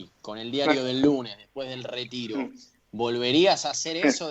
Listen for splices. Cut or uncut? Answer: uncut